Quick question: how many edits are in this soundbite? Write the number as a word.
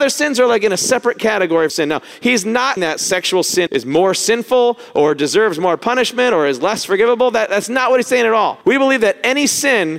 four